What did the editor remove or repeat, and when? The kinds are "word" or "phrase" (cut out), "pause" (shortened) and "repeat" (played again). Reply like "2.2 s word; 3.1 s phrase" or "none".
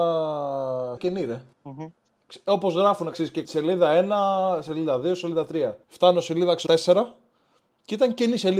1.0 s word; 1.5 s pause; 3.1 s word; 3.4 s phrase; 5.8 s pause; 6.7 s word